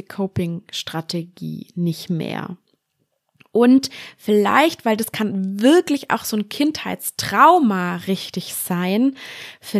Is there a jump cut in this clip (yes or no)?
no